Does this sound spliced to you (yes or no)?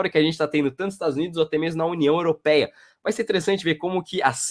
no